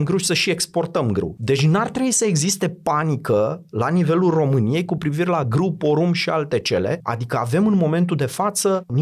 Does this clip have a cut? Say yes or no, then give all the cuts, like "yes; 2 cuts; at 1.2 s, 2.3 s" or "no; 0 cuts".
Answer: no; 0 cuts